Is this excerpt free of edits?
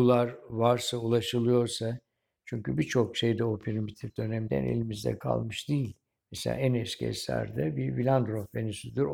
yes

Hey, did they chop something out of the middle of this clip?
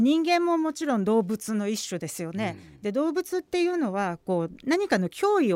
no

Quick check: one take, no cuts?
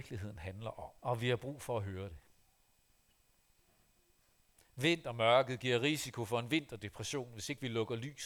no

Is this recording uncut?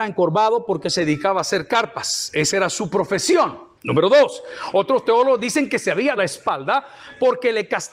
no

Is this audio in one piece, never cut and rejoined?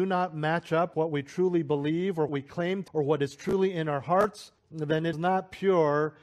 no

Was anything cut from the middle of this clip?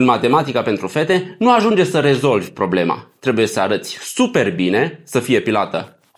no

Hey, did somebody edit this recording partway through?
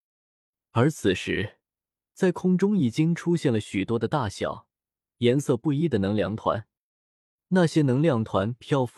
no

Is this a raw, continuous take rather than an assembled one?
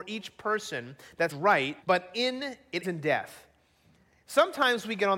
no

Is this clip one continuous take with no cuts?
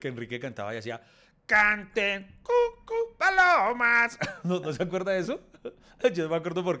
yes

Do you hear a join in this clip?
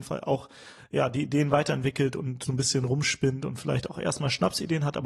no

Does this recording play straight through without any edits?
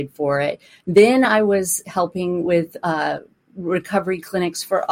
yes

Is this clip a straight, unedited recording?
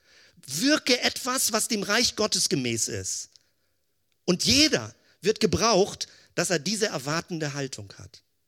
yes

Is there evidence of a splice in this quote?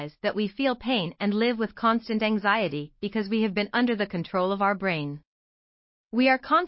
no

